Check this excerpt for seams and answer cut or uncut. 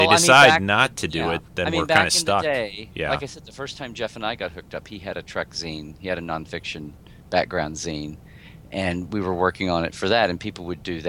cut